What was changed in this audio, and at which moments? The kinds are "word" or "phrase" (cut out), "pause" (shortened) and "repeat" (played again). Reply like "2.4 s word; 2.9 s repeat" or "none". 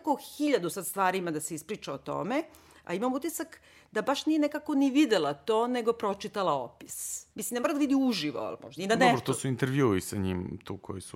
7.3 s pause; 8.8 s word